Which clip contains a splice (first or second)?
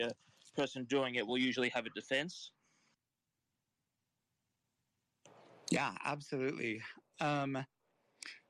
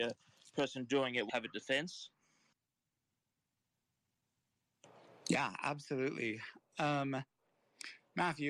second